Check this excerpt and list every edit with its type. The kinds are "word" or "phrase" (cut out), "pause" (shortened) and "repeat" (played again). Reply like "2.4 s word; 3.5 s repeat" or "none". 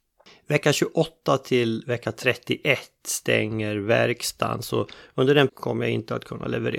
5.5 s word